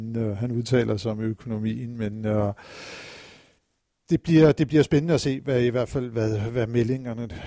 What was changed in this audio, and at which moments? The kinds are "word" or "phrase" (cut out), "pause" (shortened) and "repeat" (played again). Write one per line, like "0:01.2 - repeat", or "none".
none